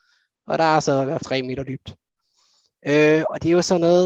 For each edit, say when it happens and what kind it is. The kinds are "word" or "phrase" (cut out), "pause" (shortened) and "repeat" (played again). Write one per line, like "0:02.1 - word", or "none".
0:01.2 - word